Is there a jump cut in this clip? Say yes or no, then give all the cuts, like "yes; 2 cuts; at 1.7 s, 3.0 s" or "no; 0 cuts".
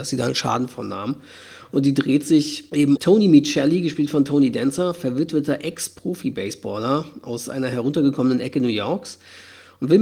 yes; 1 cut; at 3.0 s